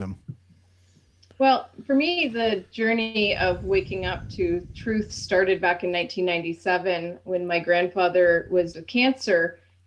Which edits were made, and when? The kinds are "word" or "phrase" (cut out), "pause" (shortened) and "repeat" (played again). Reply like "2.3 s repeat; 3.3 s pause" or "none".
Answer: 8.7 s word